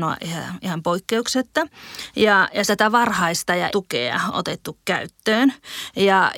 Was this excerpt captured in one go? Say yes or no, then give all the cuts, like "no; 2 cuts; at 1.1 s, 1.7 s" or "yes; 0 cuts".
no; 3 cuts; at 2.7 s, 3.7 s, 4.3 s